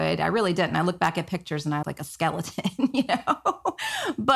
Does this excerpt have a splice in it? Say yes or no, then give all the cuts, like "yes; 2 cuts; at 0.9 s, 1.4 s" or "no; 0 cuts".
yes; 1 cut; at 1.8 s